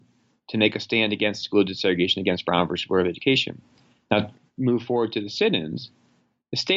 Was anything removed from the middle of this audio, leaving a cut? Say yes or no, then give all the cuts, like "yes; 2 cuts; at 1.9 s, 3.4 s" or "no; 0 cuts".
no; 0 cuts